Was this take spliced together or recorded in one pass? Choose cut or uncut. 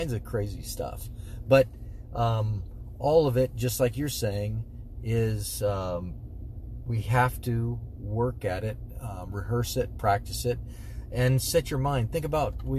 uncut